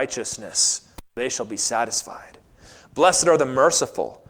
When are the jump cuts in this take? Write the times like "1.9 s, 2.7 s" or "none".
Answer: none